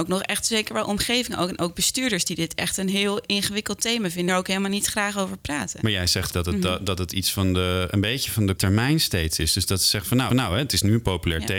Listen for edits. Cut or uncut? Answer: cut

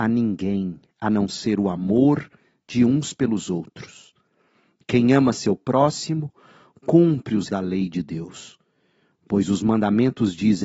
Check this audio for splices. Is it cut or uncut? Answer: cut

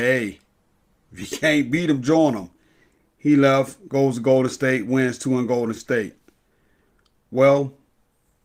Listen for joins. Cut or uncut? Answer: uncut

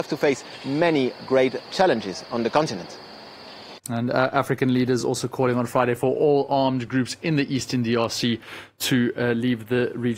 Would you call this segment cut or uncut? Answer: uncut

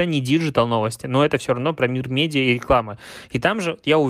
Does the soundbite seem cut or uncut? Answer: uncut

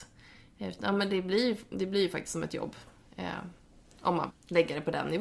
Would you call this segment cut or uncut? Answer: cut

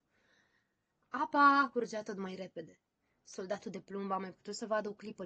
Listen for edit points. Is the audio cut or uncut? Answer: uncut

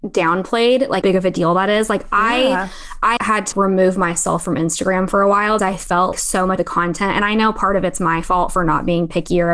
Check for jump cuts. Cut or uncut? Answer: cut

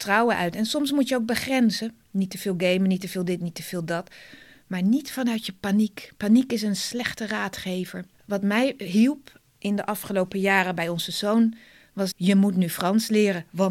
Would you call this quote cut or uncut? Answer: cut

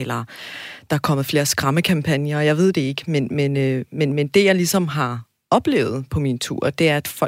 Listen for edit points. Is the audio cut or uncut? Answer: uncut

